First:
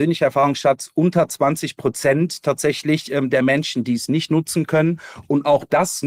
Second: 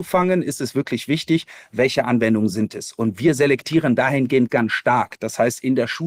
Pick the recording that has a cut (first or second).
second